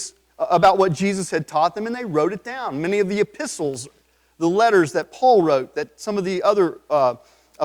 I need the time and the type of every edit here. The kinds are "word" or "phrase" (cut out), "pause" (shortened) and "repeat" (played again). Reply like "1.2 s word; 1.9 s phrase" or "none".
none

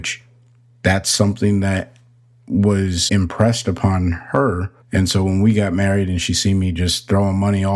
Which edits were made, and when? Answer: 3.1 s word; 4.8 s pause

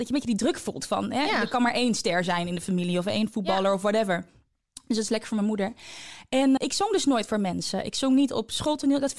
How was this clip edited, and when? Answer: 6.6 s word

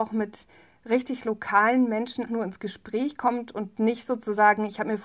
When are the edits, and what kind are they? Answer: 2.3 s word

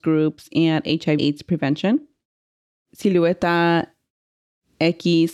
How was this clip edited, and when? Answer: 1.2 s word

